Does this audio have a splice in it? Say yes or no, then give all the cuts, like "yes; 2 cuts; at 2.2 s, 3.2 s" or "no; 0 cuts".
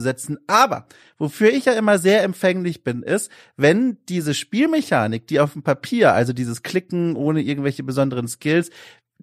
no; 0 cuts